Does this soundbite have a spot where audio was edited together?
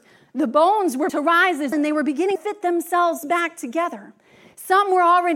yes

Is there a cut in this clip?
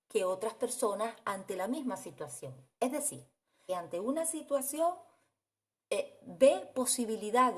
yes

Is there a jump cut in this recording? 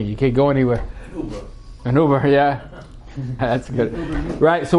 yes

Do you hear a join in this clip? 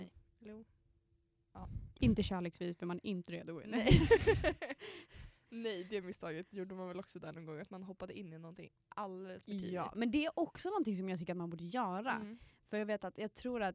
no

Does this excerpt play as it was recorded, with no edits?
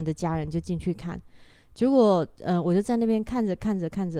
yes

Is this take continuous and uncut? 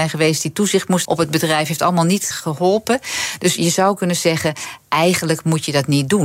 no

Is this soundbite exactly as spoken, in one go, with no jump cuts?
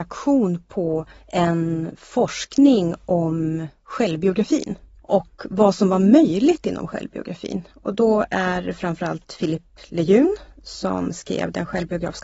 yes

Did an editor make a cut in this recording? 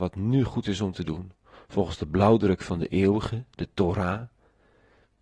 no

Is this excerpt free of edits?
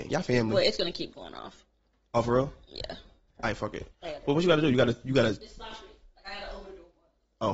no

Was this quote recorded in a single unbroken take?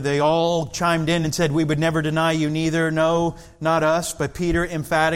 yes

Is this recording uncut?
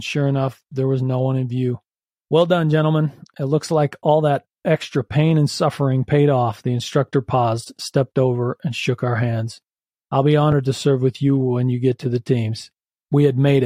yes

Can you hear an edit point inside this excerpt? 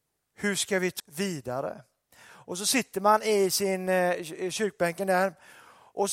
yes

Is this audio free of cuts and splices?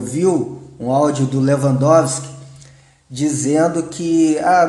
yes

